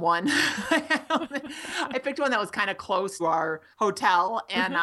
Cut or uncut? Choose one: cut